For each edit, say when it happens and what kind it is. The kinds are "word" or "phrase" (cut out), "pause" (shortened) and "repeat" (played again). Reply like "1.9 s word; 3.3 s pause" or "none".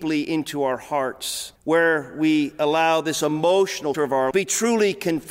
1.6 s pause; 3.9 s word; 4.3 s word